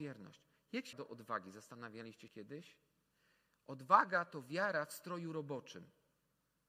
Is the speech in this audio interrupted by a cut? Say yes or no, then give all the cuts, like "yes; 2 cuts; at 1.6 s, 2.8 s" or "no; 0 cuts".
yes; 3 cuts; at 0.9 s, 2.3 s, 3.1 s